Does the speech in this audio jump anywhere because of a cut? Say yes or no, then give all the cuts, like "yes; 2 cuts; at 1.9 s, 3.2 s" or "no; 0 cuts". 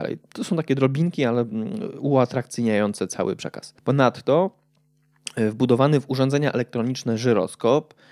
yes; 1 cut; at 3.8 s